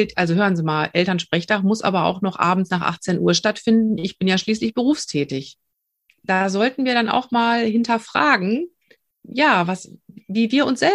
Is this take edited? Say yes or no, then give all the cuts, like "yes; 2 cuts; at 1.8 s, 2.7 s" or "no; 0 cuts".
no; 0 cuts